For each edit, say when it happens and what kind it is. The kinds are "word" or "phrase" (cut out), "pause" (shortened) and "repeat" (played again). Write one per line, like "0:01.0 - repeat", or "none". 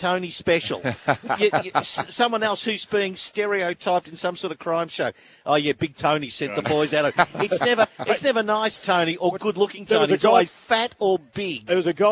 none

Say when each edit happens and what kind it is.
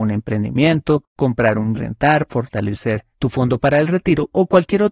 0:01.1 - pause
0:01.7 - phrase
0:03.1 - pause

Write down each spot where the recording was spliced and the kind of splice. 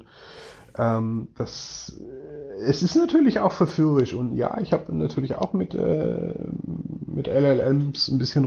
none

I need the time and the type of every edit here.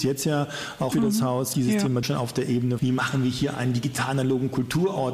0:00.9 - phrase
0:01.5 - phrase
0:02.0 - word
0:02.8 - word

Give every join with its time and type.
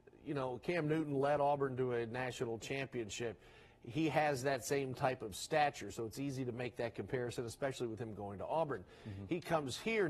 none

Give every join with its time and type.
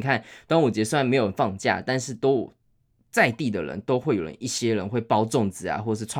none

